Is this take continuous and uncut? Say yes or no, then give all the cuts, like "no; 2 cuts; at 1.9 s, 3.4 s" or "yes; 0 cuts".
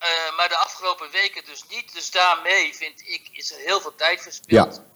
yes; 0 cuts